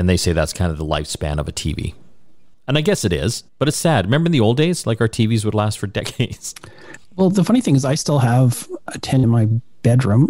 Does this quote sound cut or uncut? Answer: cut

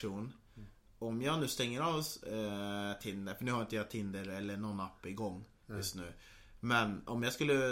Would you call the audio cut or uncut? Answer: uncut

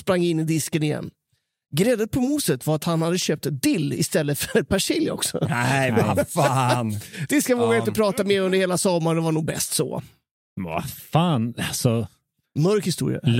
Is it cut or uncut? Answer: uncut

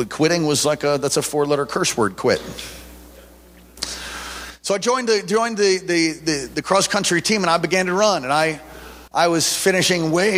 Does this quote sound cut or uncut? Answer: cut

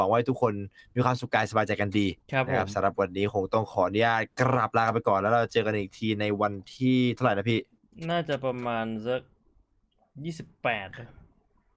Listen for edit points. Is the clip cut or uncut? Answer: cut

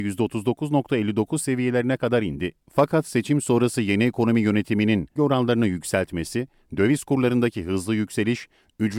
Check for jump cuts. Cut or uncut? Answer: cut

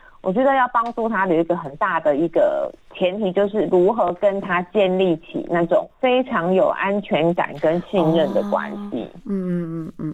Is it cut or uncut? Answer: cut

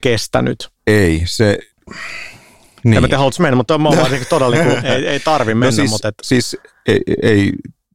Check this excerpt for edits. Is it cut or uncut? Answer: uncut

